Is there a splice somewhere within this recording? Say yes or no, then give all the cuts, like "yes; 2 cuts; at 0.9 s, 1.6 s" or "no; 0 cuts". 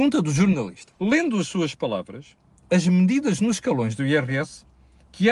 yes; 1 cut; at 1.0 s